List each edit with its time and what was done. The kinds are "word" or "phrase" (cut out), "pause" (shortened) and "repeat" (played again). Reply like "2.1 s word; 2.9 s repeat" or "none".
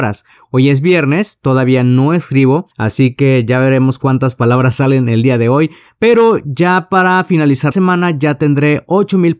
2.7 s pause; 7.7 s word